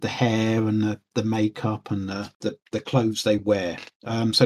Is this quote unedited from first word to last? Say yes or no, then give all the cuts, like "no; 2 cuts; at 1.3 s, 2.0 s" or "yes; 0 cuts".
yes; 0 cuts